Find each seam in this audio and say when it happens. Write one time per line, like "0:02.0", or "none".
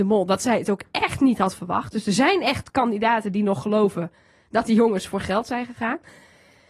none